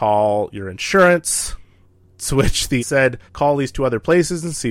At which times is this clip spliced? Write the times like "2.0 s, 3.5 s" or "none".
2.8 s, 3.3 s